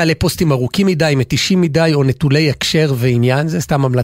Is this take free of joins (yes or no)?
yes